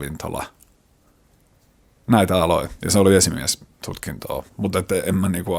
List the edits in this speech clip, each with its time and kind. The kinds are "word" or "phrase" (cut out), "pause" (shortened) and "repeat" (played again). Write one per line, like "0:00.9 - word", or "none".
0:04.5 - pause